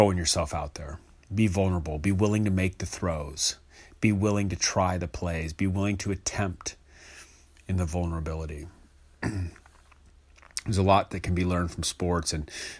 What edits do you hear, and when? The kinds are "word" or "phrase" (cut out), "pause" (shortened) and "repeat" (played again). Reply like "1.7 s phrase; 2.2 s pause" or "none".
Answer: none